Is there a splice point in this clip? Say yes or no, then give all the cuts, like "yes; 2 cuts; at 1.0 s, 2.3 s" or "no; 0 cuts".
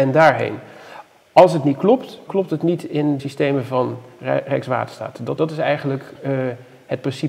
yes; 3 cuts; at 2.3 s, 3.2 s, 5.4 s